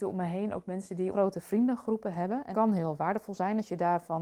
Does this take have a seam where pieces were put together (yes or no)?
yes